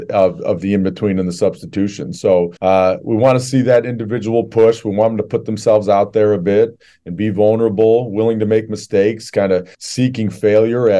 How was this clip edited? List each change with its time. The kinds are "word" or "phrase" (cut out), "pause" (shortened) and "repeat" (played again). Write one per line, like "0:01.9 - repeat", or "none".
0:02.6 - pause
0:09.7 - pause